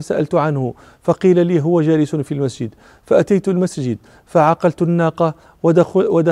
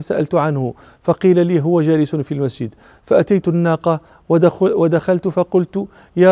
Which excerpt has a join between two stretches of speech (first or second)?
second